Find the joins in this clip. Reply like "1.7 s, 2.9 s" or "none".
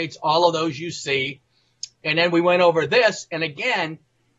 none